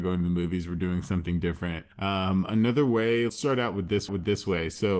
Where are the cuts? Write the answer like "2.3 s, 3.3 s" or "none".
1.9 s, 3.3 s, 4.1 s